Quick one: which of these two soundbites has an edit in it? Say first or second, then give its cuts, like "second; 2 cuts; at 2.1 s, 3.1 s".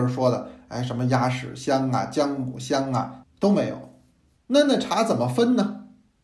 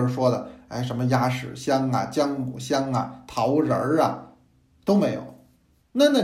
first; 1 cut; at 3.2 s